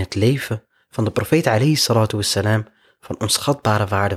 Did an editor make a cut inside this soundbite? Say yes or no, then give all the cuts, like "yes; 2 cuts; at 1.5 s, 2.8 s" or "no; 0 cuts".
no; 0 cuts